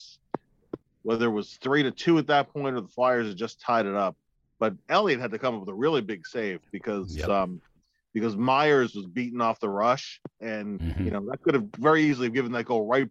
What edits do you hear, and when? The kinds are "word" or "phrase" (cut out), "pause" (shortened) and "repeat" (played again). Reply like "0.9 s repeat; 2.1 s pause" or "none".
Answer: none